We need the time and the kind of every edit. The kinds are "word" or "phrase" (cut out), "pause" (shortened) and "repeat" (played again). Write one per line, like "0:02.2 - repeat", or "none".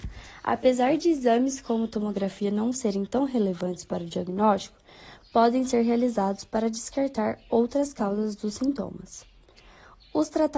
none